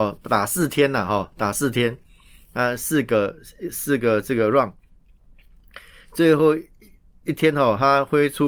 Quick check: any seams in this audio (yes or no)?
no